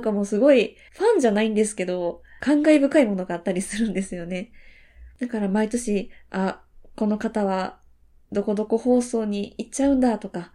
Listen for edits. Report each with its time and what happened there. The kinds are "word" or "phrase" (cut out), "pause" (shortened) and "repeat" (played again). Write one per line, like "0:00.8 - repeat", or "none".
none